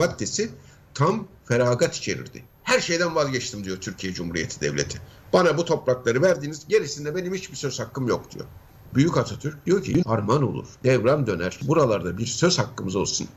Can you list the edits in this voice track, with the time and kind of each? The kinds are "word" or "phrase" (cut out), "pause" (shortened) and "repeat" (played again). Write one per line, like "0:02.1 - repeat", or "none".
0:10.0 - word